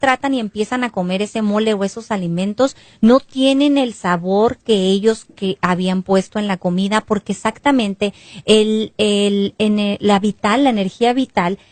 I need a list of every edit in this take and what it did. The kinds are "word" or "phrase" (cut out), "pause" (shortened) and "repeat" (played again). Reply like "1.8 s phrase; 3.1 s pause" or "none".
none